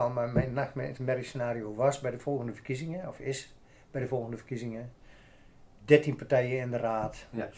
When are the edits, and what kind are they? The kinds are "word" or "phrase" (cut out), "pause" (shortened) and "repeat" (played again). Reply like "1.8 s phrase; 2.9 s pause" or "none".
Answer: none